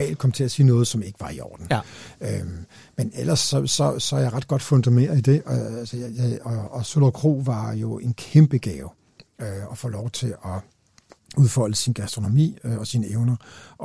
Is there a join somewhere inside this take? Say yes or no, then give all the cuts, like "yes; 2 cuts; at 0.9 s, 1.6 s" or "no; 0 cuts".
no; 0 cuts